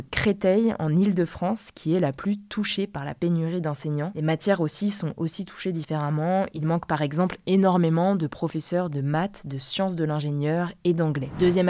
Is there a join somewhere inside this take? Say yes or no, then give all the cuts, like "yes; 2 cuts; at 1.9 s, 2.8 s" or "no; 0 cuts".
no; 0 cuts